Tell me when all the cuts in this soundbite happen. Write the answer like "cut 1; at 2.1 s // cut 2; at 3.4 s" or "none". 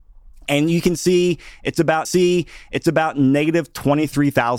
cut 1; at 2.0 s